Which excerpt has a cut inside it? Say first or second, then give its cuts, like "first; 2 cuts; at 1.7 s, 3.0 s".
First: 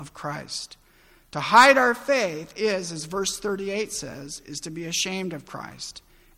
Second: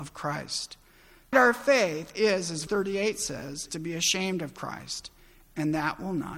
second; 3 cuts; at 1.3 s, 2.7 s, 3.7 s